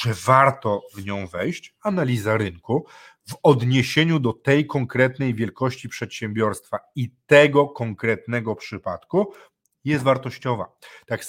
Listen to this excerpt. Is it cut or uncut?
uncut